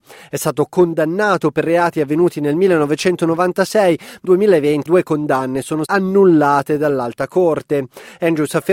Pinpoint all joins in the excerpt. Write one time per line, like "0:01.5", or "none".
0:04.2
0:04.9
0:05.9